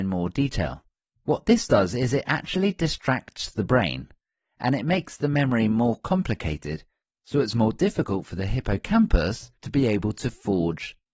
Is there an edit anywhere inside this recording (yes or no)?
yes